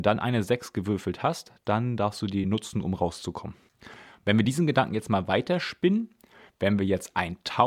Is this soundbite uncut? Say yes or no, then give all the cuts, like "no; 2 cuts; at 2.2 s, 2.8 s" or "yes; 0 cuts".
yes; 0 cuts